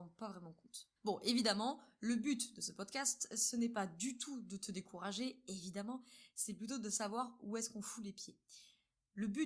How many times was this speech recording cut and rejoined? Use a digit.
1